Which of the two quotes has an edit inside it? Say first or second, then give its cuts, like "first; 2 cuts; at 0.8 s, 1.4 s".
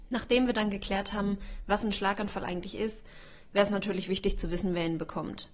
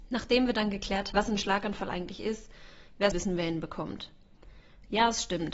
second; 2 cuts; at 1.1 s, 3.1 s